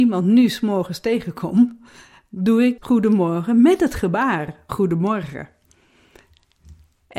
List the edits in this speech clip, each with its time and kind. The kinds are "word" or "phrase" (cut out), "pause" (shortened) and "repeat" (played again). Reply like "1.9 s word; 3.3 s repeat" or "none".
2.8 s word; 4.7 s word